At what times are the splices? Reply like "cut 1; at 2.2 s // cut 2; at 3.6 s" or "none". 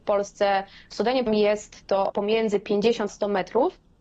cut 1; at 1.3 s // cut 2; at 2.1 s // cut 3; at 3.1 s

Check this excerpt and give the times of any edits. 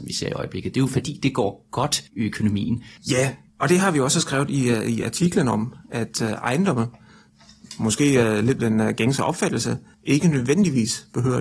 cut 1; at 2.1 s // cut 2; at 8.6 s

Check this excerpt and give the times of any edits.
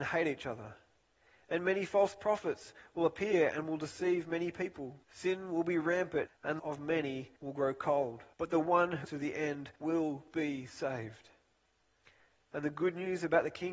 cut 1; at 5.0 s // cut 2; at 6.3 s // cut 3; at 6.6 s // cut 4; at 7.4 s // cut 5; at 8.3 s // cut 6; at 9.0 s // cut 7; at 9.8 s

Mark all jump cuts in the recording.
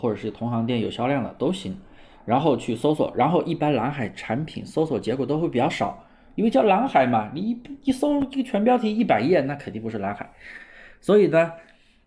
none

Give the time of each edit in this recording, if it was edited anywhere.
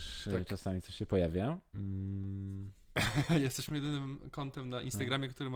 cut 1; at 3.7 s

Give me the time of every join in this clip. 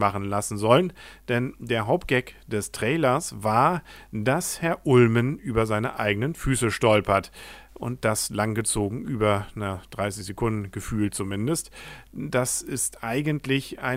none

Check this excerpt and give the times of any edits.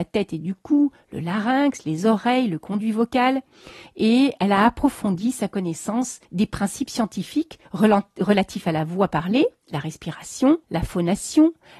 cut 1; at 6.3 s // cut 2; at 7.6 s // cut 3; at 10.6 s

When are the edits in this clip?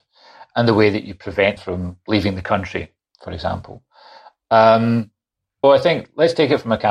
cut 1; at 1.6 s // cut 2; at 5.6 s

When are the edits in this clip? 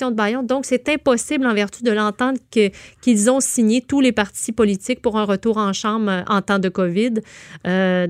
none

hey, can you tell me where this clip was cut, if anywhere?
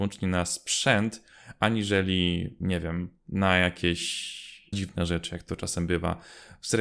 cut 1; at 3.2 s // cut 2; at 4.7 s

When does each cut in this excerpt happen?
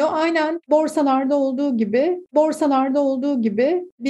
cut 1; at 2.3 s

